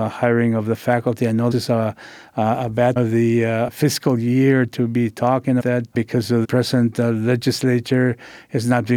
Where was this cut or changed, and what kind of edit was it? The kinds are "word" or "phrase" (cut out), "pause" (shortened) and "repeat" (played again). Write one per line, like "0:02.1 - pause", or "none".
0:01.5 - word
0:03.0 - word
0:05.6 - word
0:06.4 - word